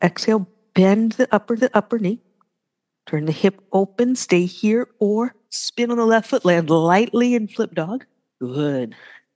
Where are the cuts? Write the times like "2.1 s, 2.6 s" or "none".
1.6 s, 5.4 s, 8.3 s